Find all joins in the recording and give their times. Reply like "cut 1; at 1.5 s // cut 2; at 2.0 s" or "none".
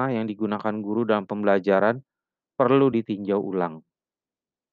none